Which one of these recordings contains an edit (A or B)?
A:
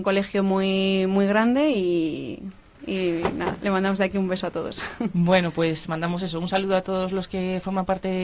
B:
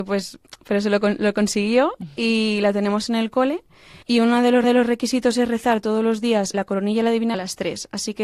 B